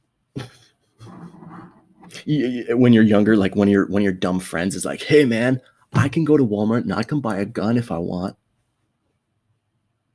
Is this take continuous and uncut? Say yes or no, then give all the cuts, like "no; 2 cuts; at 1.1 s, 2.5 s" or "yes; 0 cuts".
yes; 0 cuts